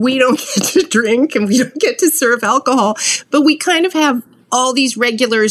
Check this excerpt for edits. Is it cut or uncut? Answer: uncut